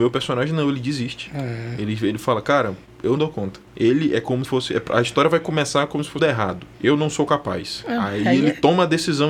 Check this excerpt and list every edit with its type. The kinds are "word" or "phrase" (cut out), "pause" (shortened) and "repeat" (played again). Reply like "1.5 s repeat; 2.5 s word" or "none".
3.2 s word; 4.4 s word; 6.2 s phrase; 6.7 s pause